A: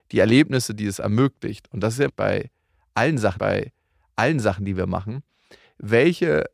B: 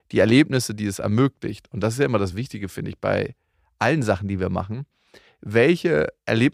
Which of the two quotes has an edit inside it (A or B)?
A